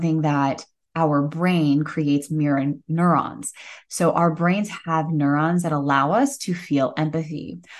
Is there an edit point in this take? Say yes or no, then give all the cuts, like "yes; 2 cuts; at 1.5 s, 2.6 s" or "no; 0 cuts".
no; 0 cuts